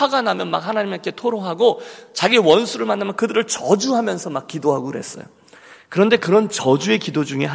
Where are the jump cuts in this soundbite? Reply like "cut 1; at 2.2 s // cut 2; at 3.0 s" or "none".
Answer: none